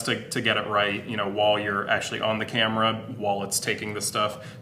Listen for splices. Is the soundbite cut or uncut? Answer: uncut